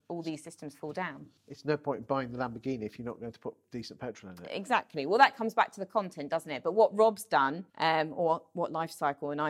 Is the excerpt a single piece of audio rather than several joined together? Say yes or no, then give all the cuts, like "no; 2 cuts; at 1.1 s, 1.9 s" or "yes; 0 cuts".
no; 2 cuts; at 1.4 s, 7.7 s